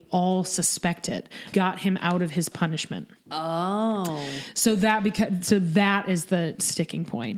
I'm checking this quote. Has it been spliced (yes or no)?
yes